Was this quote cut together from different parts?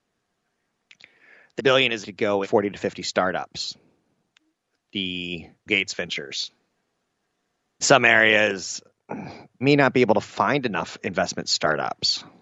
yes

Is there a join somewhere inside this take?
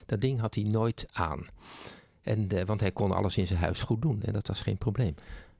no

